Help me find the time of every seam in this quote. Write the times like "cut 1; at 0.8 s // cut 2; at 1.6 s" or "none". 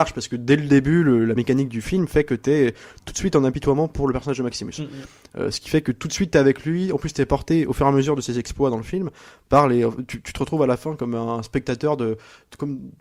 none